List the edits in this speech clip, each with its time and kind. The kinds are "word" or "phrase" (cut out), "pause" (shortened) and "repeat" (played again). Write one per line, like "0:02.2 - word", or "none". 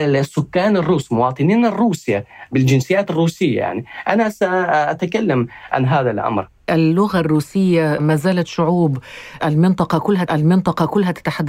0:06.7 - word
0:10.3 - repeat

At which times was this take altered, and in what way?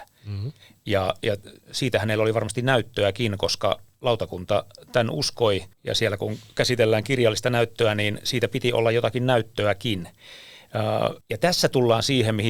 0:05.7 - pause
0:11.2 - pause

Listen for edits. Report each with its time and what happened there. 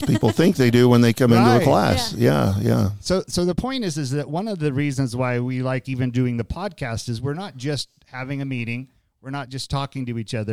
none

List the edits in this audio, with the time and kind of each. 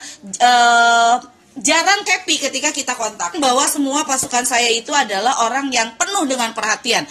0:02.1 - phrase
0:03.3 - phrase

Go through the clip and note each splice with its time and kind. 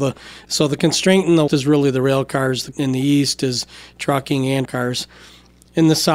0:01.5 - word
0:02.7 - word
0:04.6 - word

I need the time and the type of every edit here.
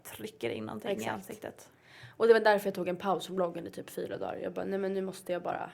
none

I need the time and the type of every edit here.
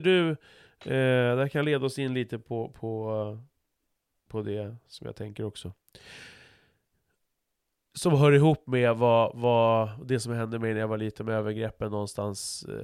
none

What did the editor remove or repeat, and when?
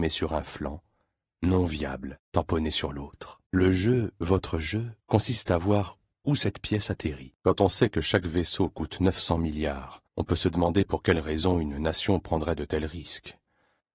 0:02.2 - pause
0:03.4 - pause
0:05.0 - pause
0:06.1 - pause
0:07.4 - pause
0:10.1 - pause

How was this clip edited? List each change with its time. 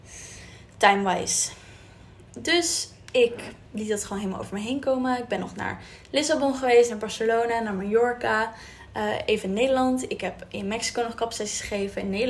0:03.7 - pause

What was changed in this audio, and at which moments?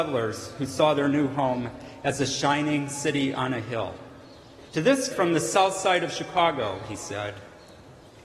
0:04.7 - pause
0:05.1 - word

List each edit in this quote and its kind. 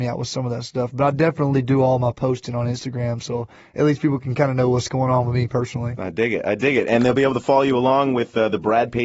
none

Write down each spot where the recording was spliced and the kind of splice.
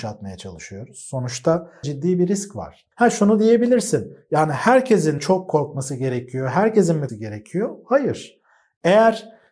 0:01.8 - word
0:02.9 - pause
0:05.2 - phrase
0:07.1 - word

